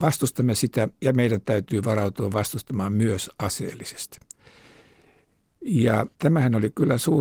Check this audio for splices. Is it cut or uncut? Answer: cut